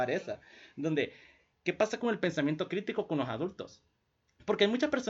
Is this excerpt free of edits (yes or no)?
yes